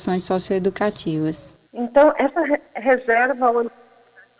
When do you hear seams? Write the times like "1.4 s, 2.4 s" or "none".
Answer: 1.7 s, 2.7 s